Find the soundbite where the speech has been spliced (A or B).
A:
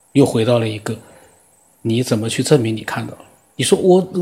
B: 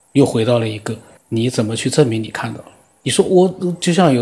B